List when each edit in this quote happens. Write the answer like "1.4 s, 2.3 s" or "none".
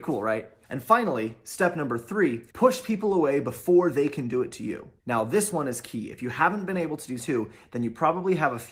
2.5 s, 5.0 s, 7.2 s